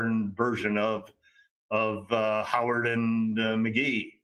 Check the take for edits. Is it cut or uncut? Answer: uncut